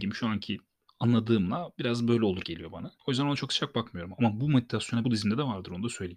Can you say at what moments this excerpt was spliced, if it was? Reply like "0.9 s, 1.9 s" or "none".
2.4 s, 3.0 s, 5.0 s